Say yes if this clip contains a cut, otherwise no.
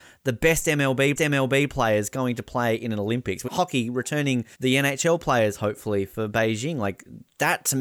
yes